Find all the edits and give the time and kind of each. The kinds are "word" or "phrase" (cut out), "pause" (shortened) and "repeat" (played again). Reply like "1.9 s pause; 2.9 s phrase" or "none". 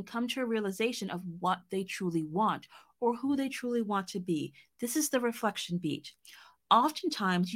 none